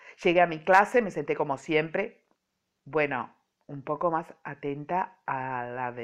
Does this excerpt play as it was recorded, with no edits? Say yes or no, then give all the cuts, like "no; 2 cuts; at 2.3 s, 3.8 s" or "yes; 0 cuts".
yes; 0 cuts